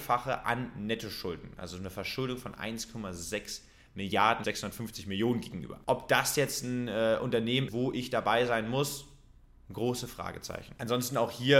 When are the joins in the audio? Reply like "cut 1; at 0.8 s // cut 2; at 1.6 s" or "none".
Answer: cut 1; at 4.4 s // cut 2; at 7.7 s